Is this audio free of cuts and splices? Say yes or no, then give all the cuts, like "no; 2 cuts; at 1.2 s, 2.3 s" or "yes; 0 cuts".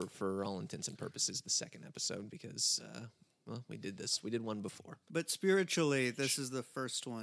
yes; 0 cuts